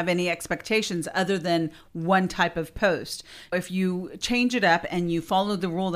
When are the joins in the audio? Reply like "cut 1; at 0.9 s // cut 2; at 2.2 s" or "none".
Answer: cut 1; at 3.5 s